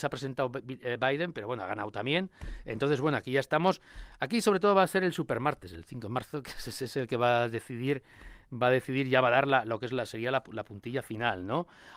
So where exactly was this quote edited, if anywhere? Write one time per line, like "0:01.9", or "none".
none